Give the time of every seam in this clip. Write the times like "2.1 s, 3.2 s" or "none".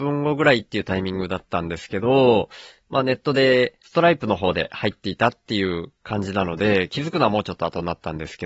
3.8 s